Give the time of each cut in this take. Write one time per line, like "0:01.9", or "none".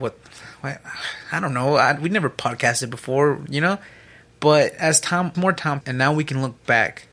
0:05.3
0:05.8